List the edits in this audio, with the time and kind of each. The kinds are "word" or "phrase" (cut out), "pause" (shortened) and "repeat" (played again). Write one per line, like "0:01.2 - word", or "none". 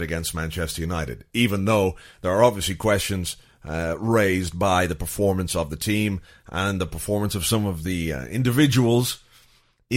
none